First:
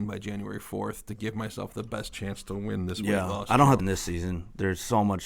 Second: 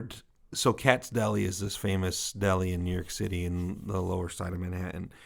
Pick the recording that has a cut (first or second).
first